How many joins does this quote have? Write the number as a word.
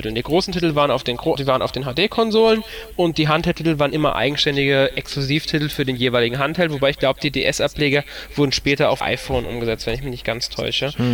two